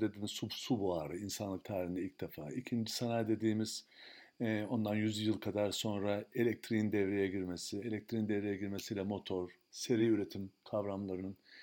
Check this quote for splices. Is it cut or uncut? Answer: uncut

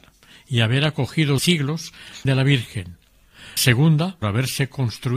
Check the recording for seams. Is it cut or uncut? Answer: cut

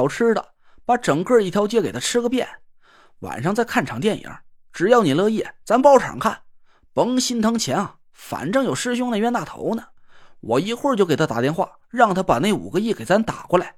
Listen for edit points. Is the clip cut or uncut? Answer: uncut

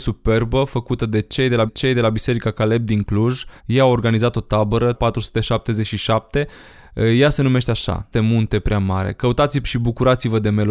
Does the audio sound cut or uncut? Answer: cut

